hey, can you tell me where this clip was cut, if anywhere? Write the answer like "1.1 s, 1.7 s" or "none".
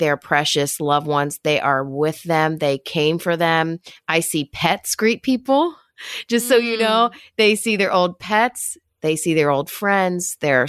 none